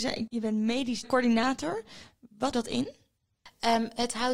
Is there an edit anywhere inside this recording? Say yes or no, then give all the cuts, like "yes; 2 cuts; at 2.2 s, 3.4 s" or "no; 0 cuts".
yes; 1 cut; at 2.5 s